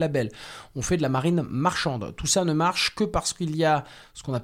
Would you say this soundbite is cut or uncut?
uncut